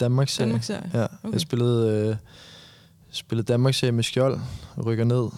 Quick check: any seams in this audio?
no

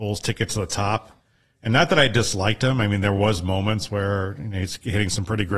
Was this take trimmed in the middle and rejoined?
no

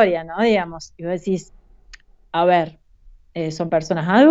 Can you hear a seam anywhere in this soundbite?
no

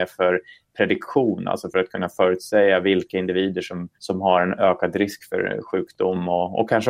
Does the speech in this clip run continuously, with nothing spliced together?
no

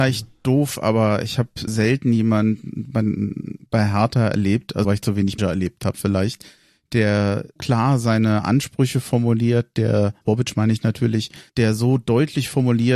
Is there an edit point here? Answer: yes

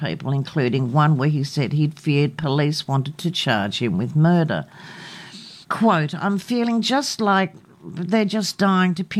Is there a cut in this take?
yes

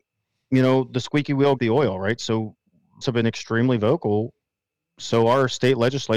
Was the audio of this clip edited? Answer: yes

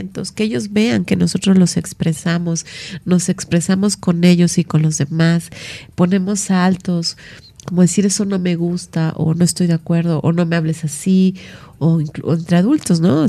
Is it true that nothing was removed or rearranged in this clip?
yes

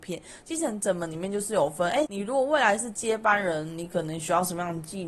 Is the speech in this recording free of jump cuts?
no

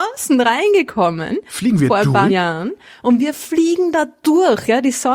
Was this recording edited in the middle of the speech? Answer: yes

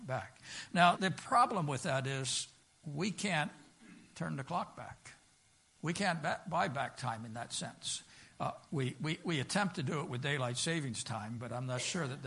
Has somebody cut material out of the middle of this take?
yes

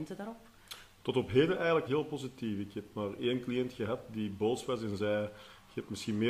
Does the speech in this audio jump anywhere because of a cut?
yes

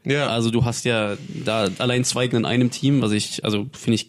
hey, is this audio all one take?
no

